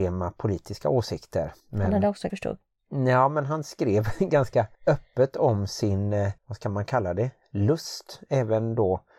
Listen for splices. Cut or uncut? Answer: cut